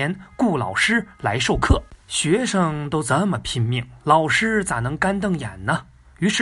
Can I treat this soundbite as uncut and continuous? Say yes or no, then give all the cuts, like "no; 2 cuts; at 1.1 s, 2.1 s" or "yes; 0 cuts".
no; 1 cut; at 2.0 s